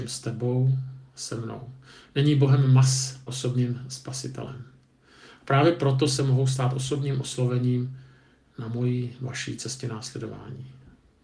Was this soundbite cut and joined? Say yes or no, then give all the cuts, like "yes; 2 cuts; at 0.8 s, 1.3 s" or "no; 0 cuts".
yes; 2 cuts; at 3.3 s, 6.2 s